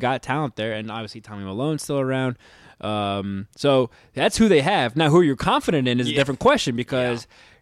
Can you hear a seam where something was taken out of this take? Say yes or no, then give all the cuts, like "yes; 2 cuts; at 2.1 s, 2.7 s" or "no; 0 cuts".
no; 0 cuts